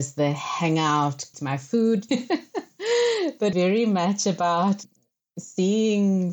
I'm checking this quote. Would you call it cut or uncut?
cut